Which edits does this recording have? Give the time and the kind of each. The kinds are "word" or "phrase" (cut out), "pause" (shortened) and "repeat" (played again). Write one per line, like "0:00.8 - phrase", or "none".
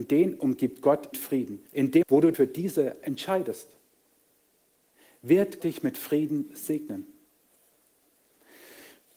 0:01.1 - word
0:01.7 - pause
0:02.0 - word
0:02.3 - word
0:03.0 - word
0:05.6 - word